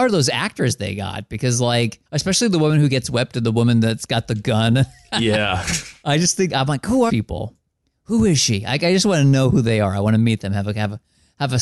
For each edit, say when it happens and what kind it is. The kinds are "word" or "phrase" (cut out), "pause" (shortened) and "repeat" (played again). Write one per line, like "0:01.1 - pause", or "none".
0:02.1 - pause
0:06.5 - word
0:07.1 - word